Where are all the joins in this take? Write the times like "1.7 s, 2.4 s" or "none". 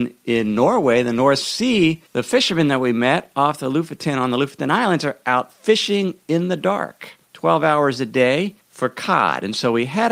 2.1 s, 7.2 s, 8.6 s